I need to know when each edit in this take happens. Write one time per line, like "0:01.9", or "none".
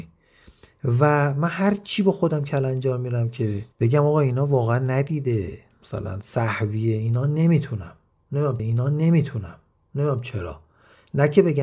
0:03.7
0:08.6